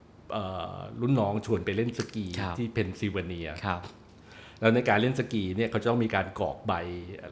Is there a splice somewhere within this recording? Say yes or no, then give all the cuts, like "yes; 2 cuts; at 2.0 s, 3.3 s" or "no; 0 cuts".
no; 0 cuts